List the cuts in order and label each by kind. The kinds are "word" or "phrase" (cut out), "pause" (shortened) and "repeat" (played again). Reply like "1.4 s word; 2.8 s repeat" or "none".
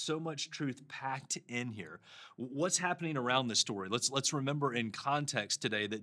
none